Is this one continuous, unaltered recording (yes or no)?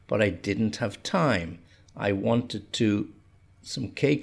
yes